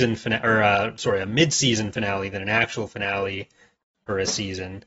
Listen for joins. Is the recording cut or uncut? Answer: uncut